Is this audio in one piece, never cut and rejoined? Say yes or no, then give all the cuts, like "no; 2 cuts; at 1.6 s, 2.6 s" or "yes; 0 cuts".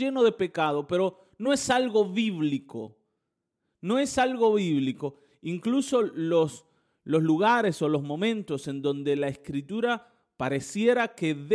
yes; 0 cuts